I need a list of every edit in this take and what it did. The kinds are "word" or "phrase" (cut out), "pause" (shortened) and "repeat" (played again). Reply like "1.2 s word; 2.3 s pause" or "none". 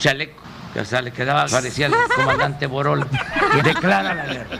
1.5 s word; 3.6 s word